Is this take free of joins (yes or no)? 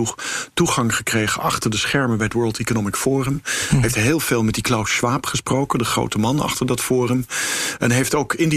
yes